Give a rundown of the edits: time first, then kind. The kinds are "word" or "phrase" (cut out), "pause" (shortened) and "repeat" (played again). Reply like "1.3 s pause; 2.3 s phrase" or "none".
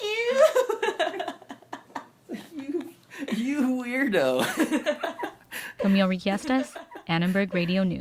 none